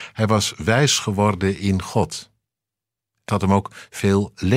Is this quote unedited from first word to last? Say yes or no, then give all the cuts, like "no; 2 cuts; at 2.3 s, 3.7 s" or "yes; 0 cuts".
no; 1 cut; at 3.3 s